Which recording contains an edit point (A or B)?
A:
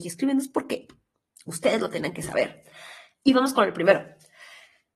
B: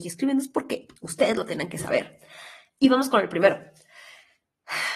B